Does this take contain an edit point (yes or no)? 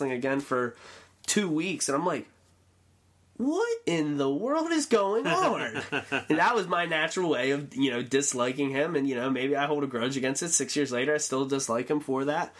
no